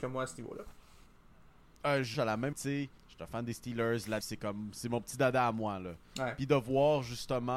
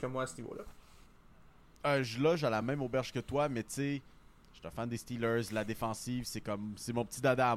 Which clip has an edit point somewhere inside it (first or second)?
first